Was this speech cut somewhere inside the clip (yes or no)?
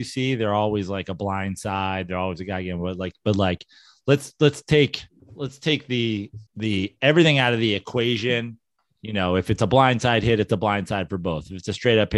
yes